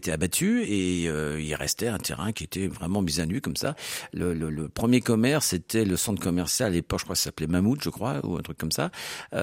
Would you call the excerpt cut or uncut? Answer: uncut